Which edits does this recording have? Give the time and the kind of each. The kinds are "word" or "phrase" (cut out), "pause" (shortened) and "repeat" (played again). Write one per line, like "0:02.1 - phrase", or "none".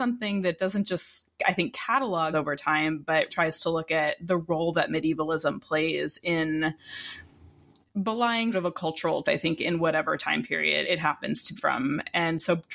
0:02.3 - word
0:03.3 - word
0:08.5 - word
0:09.2 - word
0:10.8 - word
0:11.6 - word